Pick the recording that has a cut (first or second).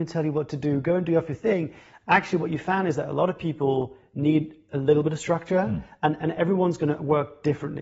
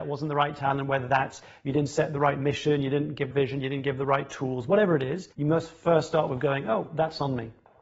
second